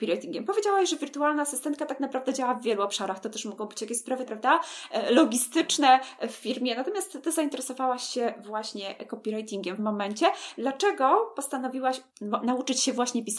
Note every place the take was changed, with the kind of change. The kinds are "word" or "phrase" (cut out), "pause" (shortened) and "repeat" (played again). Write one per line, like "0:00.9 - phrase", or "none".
0:04.3 - phrase
0:09.8 - phrase
0:12.1 - pause